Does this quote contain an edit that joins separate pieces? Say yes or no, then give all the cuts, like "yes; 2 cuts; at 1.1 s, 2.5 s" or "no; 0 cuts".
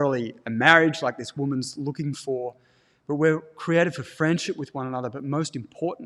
no; 0 cuts